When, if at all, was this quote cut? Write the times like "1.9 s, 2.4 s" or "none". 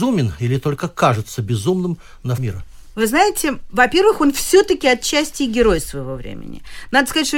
2.4 s